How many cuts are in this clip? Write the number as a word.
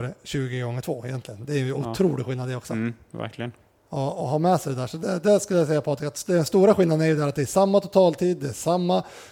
zero